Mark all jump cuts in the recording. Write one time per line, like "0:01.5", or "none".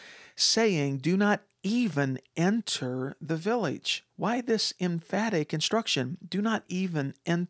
0:04.1